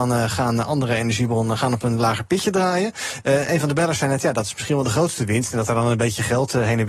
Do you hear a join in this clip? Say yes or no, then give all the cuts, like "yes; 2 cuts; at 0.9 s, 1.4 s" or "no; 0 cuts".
no; 0 cuts